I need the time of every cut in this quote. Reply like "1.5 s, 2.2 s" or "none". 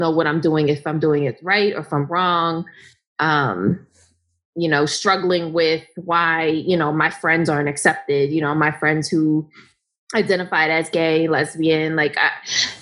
none